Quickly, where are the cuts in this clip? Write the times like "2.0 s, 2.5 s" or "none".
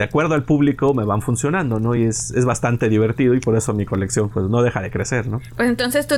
none